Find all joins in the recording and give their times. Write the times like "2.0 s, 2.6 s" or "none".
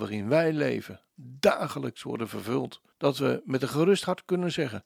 2.9 s